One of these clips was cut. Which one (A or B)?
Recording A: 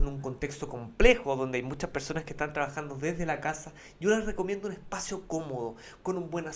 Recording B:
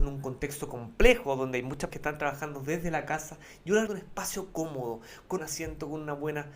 B